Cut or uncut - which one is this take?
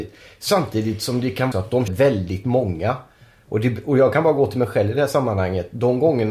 cut